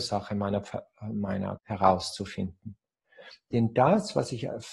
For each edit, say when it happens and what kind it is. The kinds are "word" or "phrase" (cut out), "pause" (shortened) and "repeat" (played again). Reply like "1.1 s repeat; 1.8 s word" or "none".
1.6 s word